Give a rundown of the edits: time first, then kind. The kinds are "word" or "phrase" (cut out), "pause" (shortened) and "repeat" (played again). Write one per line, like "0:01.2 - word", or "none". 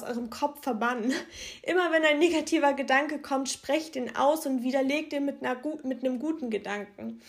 none